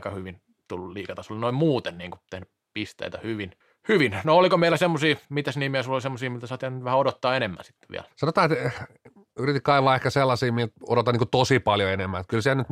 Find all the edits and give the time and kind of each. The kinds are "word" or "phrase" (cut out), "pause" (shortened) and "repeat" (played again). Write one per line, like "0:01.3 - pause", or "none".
0:03.6 - pause
0:05.2 - pause
0:08.1 - pause